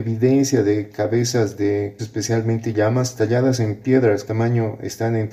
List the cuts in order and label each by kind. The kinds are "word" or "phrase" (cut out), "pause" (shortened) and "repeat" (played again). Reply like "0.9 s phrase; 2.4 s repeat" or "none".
2.0 s word; 4.3 s word